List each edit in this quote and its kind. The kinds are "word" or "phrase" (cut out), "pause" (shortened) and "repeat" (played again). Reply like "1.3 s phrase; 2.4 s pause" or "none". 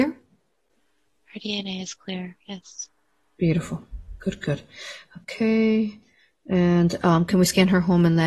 none